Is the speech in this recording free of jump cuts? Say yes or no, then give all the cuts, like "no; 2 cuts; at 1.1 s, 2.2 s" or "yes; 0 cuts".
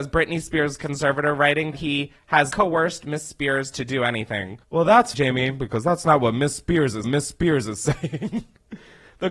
no; 5 cuts; at 1.7 s, 2.5 s, 4.6 s, 5.1 s, 7.0 s